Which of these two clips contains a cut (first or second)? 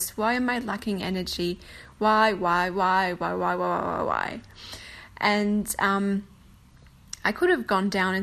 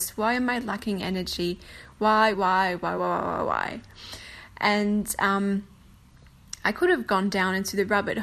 second